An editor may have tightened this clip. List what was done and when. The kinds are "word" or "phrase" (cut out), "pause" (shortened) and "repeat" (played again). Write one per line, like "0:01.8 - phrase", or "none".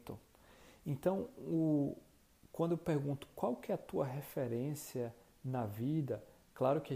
none